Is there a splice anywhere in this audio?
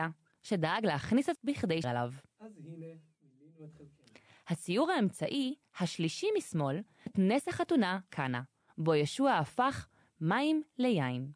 yes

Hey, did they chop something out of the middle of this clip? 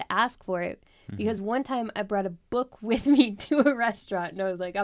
no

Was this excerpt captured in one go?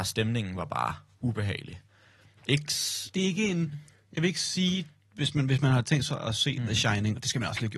yes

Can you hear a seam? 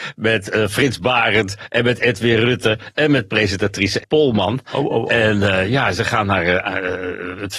yes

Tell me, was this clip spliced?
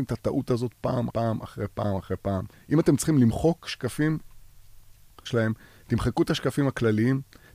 yes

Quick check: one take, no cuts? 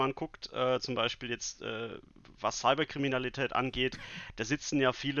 yes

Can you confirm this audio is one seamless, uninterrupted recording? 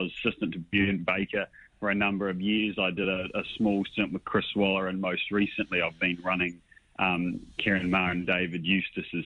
yes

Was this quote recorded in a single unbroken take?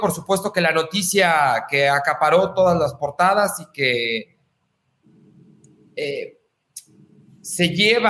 yes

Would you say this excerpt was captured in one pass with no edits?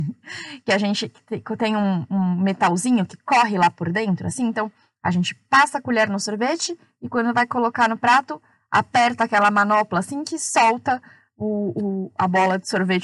yes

